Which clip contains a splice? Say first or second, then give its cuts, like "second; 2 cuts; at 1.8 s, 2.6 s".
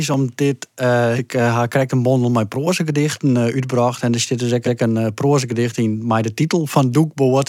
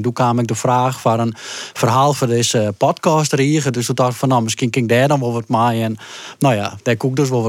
first; 2 cuts; at 1.2 s, 4.6 s